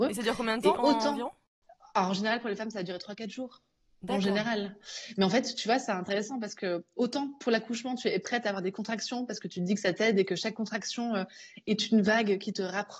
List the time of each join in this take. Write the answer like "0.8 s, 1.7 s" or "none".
none